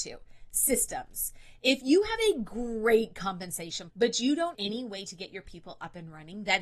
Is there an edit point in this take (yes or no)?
yes